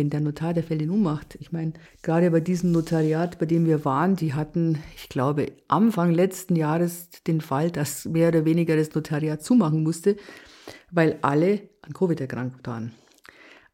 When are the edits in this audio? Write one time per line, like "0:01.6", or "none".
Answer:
0:01.9